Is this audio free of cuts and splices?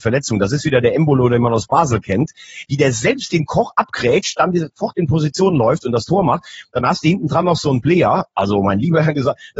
yes; 0 cuts

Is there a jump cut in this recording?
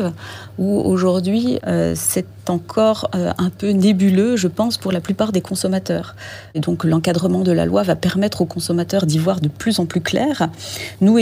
no; 0 cuts

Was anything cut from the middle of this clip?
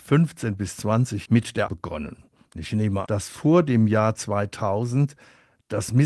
yes; 3 cuts; at 1.3 s, 1.7 s, 3.1 s

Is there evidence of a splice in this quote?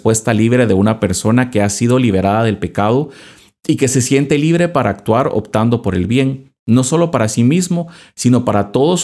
no; 0 cuts

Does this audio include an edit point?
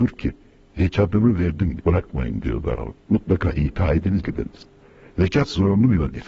yes; 3 cuts; at 1.8 s, 3.0 s, 4.2 s

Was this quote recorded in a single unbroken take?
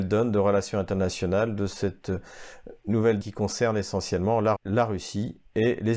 no; 2 cuts; at 3.2 s, 4.6 s

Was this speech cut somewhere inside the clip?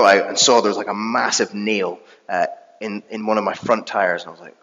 no; 0 cuts

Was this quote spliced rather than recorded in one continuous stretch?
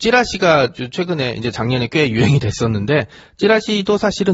no; 0 cuts

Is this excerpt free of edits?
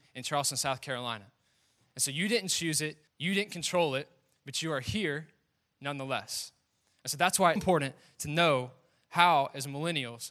no; 2 cuts; at 3.1 s, 7.6 s

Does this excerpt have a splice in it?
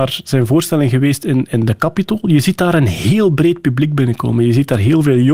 no; 0 cuts

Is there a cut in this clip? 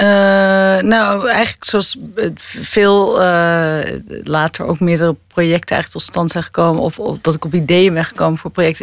no; 0 cuts

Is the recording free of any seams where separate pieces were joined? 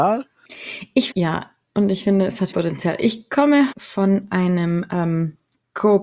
no; 3 cuts; at 1.1 s, 2.5 s, 3.7 s

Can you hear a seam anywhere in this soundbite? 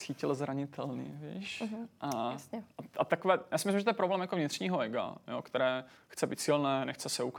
yes; 2 cuts; at 2.7 s, 6.0 s

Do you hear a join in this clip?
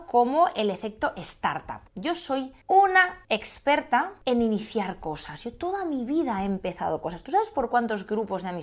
yes; 1 cut; at 1.9 s

